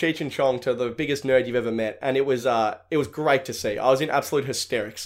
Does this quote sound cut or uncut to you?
uncut